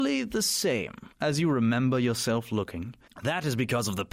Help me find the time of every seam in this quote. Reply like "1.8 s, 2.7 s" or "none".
1.1 s, 3.1 s